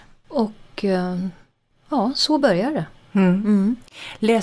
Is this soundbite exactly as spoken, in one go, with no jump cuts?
yes; 0 cuts

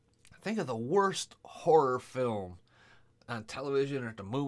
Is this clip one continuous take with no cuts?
yes; 0 cuts

